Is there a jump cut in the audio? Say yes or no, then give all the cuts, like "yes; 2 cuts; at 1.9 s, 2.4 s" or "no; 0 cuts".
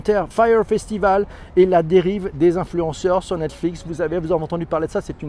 no; 0 cuts